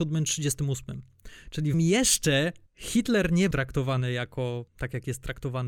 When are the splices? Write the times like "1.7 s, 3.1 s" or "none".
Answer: 1.7 s, 2.7 s, 3.5 s, 4.7 s